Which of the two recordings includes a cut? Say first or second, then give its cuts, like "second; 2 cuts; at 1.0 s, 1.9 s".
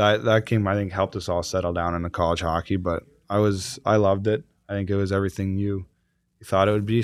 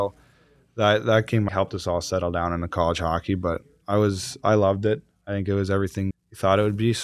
second; 2 cuts; at 1.5 s, 6.1 s